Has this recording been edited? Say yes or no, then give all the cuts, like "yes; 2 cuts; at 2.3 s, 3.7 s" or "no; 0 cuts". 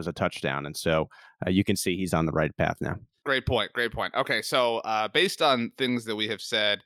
no; 0 cuts